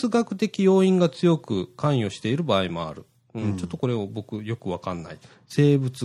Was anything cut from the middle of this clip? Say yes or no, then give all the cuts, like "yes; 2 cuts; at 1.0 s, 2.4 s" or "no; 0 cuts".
no; 0 cuts